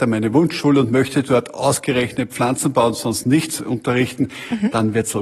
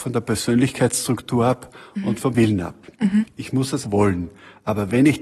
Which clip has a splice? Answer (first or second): second